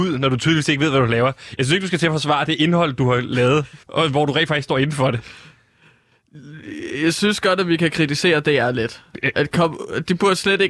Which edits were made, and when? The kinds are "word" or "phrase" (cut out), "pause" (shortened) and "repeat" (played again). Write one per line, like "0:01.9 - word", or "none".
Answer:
0:03.8 - pause